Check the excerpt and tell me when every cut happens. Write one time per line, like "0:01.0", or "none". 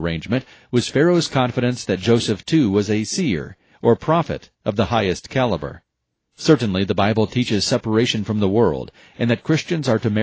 none